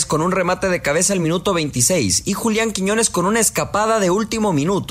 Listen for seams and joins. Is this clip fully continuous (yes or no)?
yes